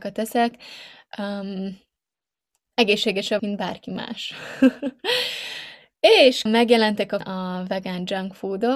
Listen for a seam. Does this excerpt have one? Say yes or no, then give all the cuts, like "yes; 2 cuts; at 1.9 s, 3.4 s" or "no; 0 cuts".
yes; 3 cuts; at 3.4 s, 6.5 s, 7.2 s